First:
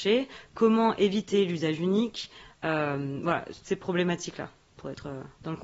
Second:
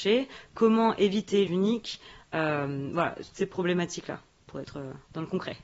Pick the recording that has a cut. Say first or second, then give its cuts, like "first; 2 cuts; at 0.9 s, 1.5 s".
second; 1 cut; at 1.5 s